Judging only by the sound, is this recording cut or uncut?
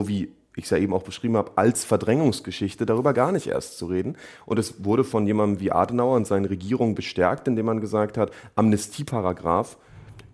uncut